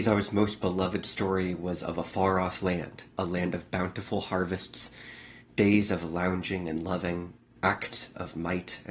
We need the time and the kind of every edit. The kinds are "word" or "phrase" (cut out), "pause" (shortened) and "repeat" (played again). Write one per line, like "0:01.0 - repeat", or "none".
0:03.1 - pause